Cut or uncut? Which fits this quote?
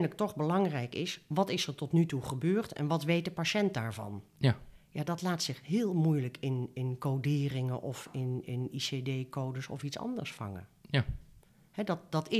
uncut